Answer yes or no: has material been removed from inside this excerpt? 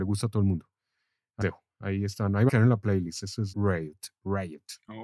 yes